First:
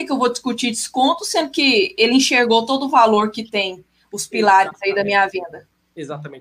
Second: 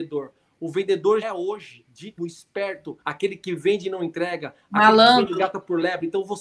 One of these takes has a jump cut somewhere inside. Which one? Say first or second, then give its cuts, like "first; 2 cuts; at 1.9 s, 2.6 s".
second; 3 cuts; at 1.2 s, 2.2 s, 3.0 s